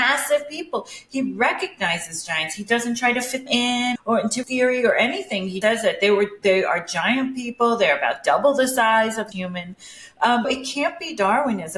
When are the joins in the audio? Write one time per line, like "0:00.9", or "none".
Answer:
0:03.5
0:04.0
0:04.4
0:05.6
0:09.3
0:10.4

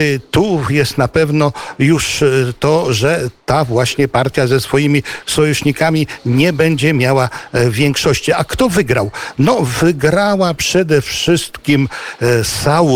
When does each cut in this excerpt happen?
none

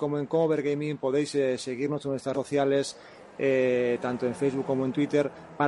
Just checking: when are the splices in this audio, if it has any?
0:02.3

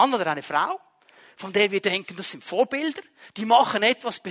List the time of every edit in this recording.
none

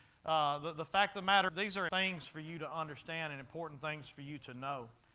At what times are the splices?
0:01.5
0:01.9

